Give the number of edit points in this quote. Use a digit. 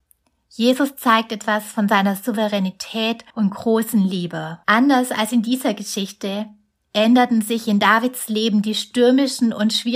2